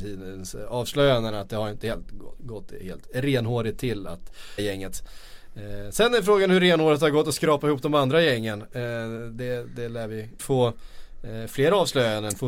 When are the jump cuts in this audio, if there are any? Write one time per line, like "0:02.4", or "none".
0:04.6
0:10.4